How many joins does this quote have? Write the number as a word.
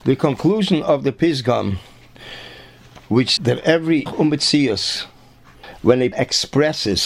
three